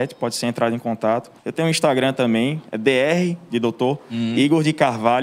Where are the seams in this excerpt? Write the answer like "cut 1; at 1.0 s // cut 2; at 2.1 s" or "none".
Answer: cut 1; at 1.4 s // cut 2; at 2.7 s

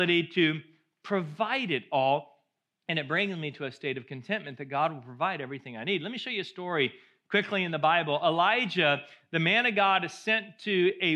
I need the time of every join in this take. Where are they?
none

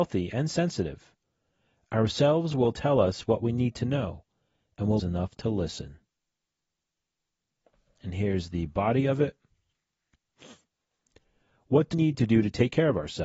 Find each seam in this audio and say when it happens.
cut 1; at 5.0 s // cut 2; at 11.9 s

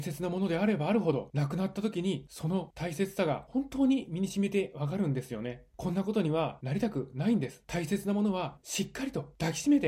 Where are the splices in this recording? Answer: cut 1; at 8.6 s

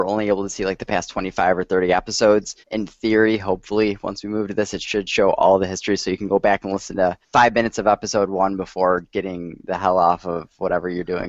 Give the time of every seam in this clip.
cut 1; at 2.6 s // cut 2; at 7.2 s

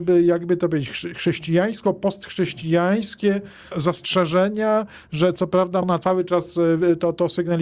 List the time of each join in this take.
cut 1; at 3.7 s // cut 2; at 5.8 s

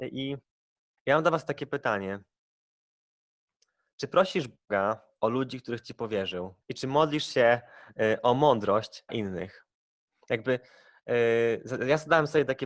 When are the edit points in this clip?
cut 1; at 1.0 s // cut 2; at 6.6 s // cut 3; at 9.1 s

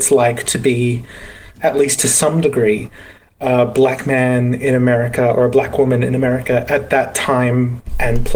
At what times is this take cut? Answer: cut 1; at 1.5 s

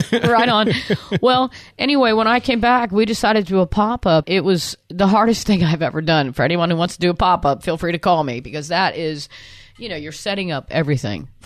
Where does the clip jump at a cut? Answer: cut 1; at 4.2 s

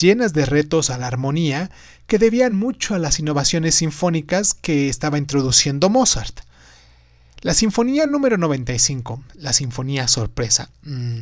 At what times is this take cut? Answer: none

